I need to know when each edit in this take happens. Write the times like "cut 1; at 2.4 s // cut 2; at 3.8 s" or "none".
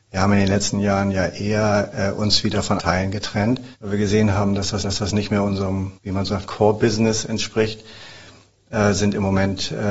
cut 1; at 2.8 s // cut 2; at 3.7 s // cut 3; at 4.8 s // cut 4; at 6.0 s // cut 5; at 6.3 s